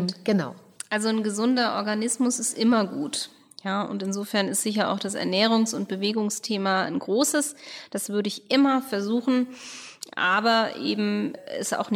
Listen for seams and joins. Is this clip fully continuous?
yes; 0 cuts

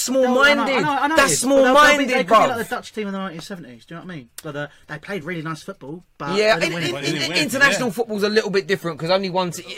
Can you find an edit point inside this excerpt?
no; 0 cuts

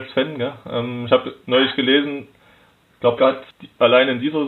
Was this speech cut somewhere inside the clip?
yes; 1 cut; at 3.2 s

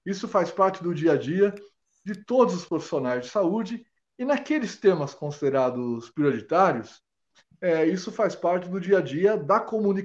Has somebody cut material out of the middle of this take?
no; 0 cuts

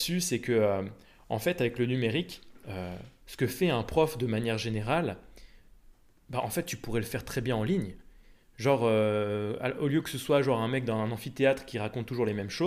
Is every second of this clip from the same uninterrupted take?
yes; 0 cuts

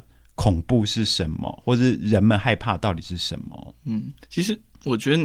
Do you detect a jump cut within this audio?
yes; 1 cut; at 4.2 s

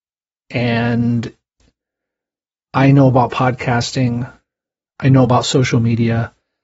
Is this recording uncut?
yes; 0 cuts

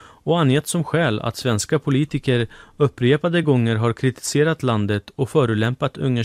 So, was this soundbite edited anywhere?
no; 0 cuts

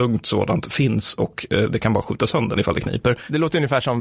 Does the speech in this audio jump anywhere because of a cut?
yes; 1 cut; at 2.6 s

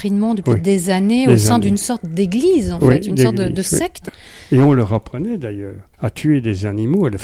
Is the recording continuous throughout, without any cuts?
no; 1 cut; at 5.9 s

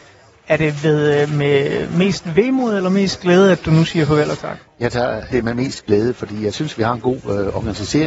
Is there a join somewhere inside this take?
yes; 1 cut; at 5.3 s

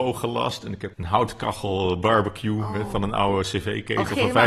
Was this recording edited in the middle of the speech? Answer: yes; 1 cut; at 0.9 s

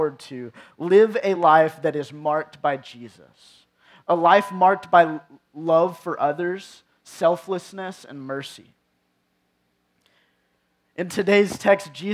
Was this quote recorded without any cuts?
yes; 0 cuts

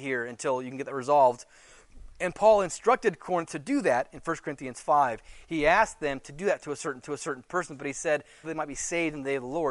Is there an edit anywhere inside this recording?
yes; 2 cuts; at 7.0 s, 8.4 s

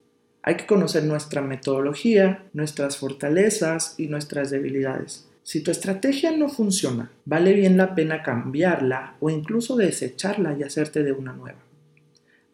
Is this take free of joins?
no; 3 cuts; at 2.5 s, 5.4 s, 7.2 s

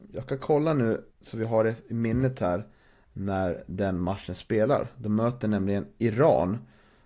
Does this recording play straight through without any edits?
no; 1 cut; at 1.1 s

